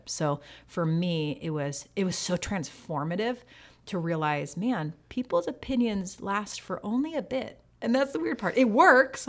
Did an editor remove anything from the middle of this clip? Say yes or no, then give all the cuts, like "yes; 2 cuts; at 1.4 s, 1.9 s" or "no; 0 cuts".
no; 0 cuts